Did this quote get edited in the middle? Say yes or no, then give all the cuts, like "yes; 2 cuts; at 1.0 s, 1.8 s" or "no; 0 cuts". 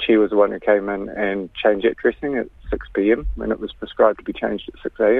no; 0 cuts